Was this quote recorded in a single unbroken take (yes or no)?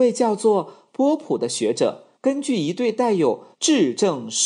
no